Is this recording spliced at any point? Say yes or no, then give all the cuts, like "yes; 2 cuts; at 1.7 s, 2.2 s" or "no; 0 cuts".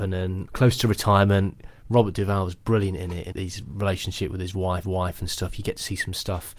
yes; 2 cuts; at 3.3 s, 4.8 s